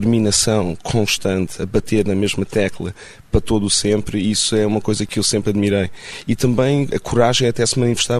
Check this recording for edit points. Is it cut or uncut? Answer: uncut